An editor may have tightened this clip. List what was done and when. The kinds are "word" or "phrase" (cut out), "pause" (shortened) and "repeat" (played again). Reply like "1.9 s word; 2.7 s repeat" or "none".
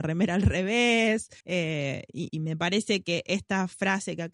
1.4 s pause; 2.3 s word